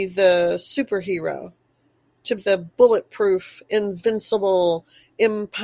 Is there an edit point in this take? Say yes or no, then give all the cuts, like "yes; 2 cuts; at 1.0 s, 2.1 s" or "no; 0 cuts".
yes; 1 cut; at 2.4 s